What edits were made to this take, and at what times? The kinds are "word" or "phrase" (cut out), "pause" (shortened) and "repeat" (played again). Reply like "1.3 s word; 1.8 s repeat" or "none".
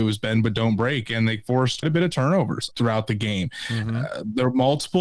1.8 s word; 2.7 s word